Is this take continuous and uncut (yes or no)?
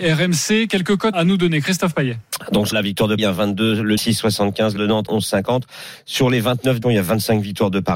no